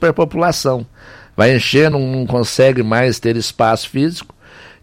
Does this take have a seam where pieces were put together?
yes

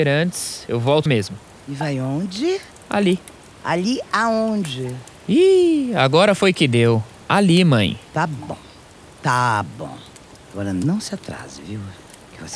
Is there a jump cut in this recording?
yes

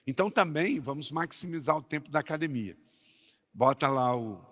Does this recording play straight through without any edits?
yes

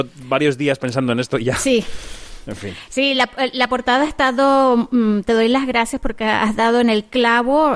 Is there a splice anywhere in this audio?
no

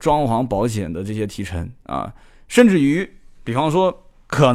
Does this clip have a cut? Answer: no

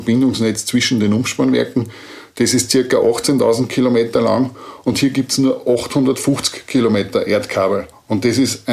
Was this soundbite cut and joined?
no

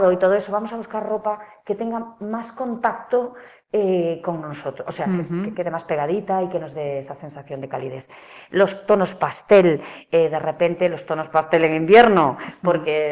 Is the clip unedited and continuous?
yes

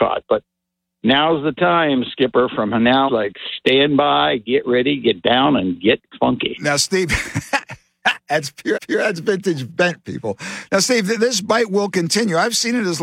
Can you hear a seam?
yes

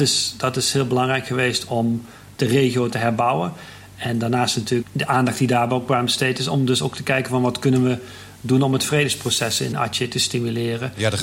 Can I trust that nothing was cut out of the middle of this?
yes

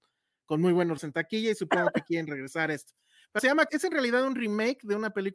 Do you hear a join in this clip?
yes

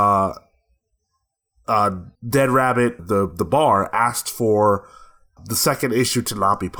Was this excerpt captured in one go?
no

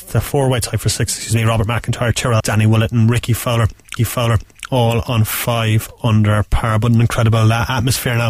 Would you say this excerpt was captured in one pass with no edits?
no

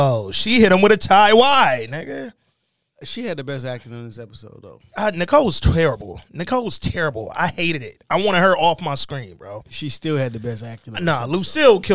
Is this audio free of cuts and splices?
yes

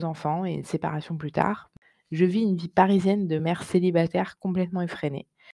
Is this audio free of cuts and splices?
yes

